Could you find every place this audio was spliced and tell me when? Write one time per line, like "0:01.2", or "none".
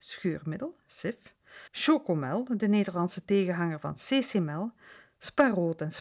0:01.7